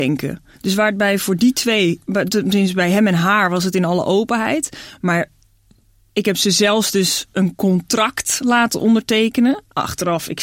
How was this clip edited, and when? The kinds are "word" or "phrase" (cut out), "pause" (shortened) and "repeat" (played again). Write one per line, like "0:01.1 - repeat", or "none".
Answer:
none